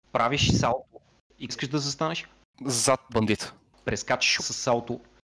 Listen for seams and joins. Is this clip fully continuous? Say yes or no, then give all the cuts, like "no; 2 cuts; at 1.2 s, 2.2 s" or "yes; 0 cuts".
no; 3 cuts; at 1.5 s, 3.1 s, 4.4 s